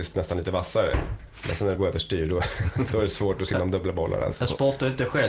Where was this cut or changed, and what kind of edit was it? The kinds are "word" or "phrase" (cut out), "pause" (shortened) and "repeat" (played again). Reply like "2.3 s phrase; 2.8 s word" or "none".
1.8 s phrase; 2.9 s word